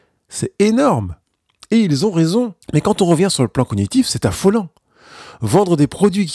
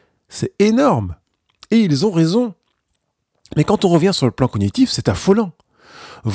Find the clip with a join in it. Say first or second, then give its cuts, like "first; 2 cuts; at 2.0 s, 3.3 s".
first; 1 cut; at 2.6 s